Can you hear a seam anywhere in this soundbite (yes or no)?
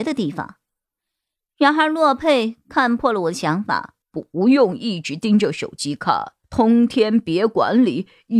yes